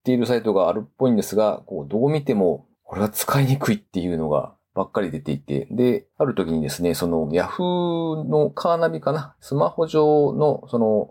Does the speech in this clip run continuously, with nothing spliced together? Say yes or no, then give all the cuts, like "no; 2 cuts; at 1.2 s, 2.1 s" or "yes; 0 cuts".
no; 3 cuts; at 2.7 s, 4.6 s, 6.1 s